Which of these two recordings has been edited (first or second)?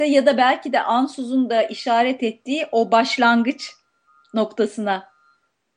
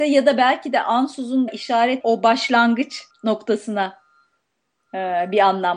second